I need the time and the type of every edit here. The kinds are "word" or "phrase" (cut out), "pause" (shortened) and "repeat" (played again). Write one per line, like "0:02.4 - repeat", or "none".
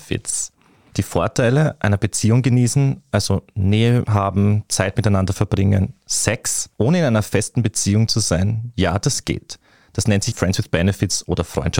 0:06.7 - pause
0:10.3 - word